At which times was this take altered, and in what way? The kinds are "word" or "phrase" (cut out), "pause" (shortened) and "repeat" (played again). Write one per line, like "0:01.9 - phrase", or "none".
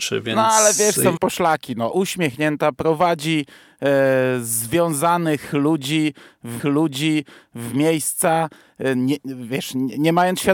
0:01.2 - phrase
0:01.9 - phrase
0:06.6 - repeat